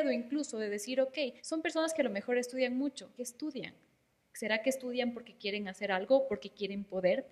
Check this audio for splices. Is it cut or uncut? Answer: cut